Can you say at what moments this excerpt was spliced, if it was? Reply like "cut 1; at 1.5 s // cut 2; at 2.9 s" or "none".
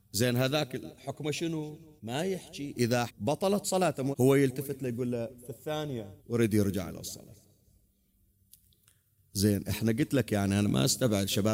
cut 1; at 2.0 s // cut 2; at 3.1 s // cut 3; at 4.1 s // cut 4; at 6.2 s

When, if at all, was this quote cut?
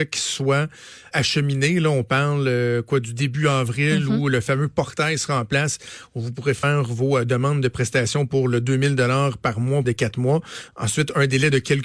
cut 1; at 1.1 s // cut 2; at 9.8 s

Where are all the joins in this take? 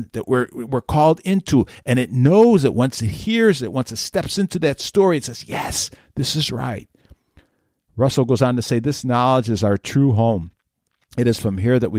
none

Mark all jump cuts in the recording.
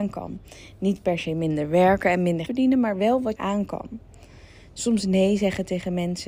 cut 1; at 2.5 s // cut 2; at 3.4 s

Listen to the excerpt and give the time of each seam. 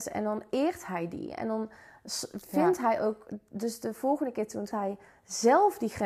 cut 1; at 4.7 s

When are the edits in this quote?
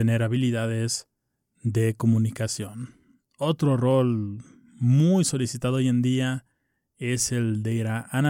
none

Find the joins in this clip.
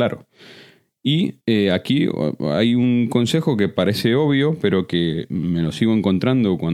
cut 1; at 1.4 s

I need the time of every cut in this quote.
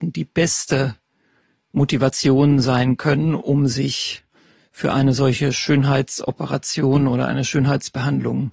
none

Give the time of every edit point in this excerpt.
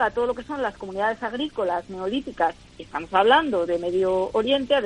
none

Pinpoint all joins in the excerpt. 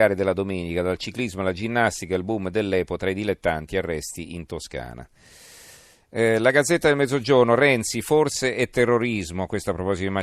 none

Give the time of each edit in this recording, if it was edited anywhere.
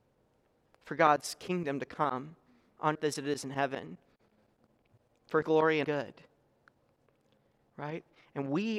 cut 1; at 3.0 s // cut 2; at 5.4 s // cut 3; at 5.8 s

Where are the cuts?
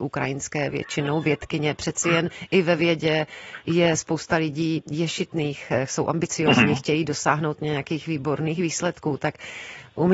none

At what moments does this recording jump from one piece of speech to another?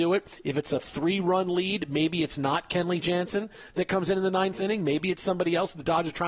none

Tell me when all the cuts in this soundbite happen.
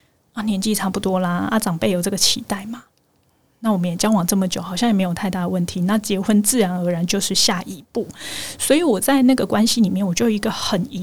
none

